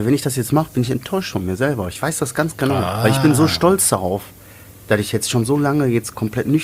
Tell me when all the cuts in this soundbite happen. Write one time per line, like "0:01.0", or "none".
none